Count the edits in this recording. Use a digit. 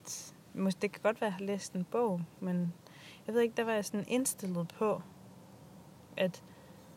0